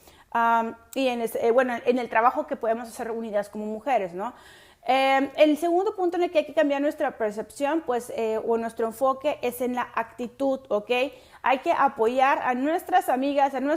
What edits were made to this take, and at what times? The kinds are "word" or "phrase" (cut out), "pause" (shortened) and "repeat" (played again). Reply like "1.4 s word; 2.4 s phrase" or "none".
none